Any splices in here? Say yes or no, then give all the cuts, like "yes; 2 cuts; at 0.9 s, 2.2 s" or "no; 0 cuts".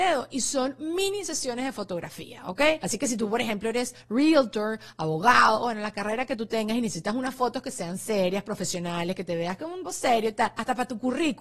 yes; 1 cut; at 9.9 s